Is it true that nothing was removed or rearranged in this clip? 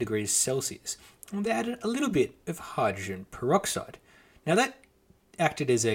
yes; 0 cuts

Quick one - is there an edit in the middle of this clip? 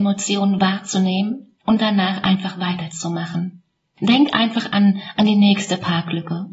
no; 0 cuts

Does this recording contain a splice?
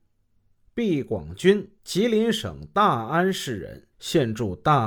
yes; 2 cuts; at 1.8 s, 3.9 s

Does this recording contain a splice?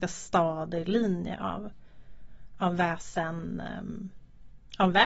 no; 0 cuts

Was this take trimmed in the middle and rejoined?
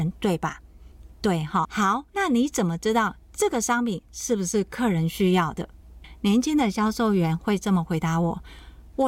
yes; 2 cuts; at 1.6 s, 2.1 s

